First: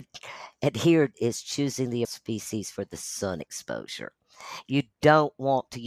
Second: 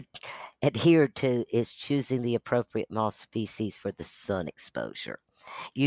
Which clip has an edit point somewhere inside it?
first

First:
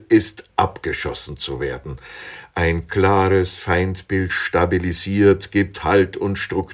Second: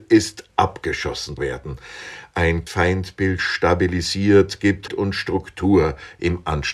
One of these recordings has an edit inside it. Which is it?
second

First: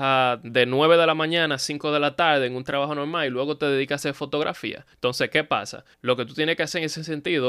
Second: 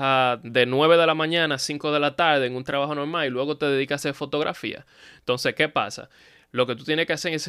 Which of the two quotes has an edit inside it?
first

